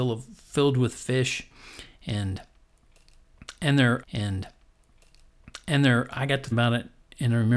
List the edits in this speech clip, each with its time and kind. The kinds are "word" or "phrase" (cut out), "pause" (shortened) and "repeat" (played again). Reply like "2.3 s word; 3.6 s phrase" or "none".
4.0 s repeat; 6.5 s word